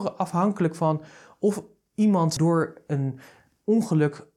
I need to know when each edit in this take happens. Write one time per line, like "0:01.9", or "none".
none